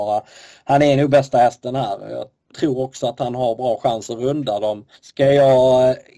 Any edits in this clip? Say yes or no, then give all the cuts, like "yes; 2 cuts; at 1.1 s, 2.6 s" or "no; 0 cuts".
yes; 1 cut; at 5.0 s